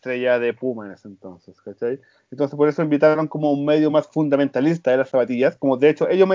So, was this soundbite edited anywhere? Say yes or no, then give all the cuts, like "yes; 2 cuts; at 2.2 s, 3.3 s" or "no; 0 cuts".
no; 0 cuts